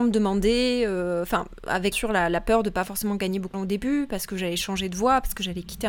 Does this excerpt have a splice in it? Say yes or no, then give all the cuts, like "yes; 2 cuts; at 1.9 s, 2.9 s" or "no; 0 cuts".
yes; 2 cuts; at 1.9 s, 3.5 s